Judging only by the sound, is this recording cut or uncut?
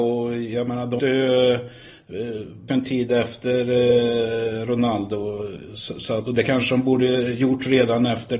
cut